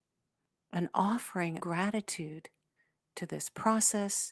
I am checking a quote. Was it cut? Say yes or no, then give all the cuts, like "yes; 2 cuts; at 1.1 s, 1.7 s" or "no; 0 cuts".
yes; 1 cut; at 1.6 s